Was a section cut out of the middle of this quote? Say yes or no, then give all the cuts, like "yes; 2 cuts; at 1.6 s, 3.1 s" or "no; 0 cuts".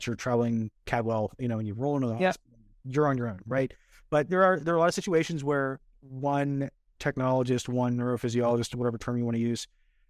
no; 0 cuts